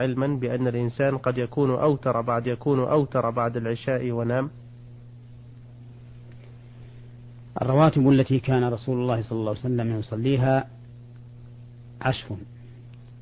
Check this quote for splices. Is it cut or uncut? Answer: cut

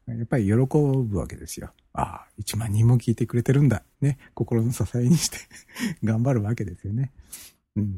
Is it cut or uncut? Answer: cut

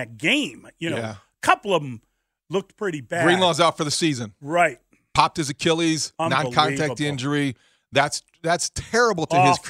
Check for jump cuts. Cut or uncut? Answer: uncut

